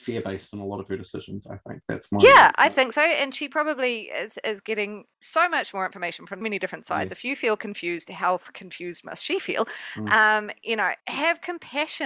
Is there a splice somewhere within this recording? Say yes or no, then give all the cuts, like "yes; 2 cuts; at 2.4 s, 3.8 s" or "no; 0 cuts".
yes; 3 cuts; at 5.1 s, 6.4 s, 11.0 s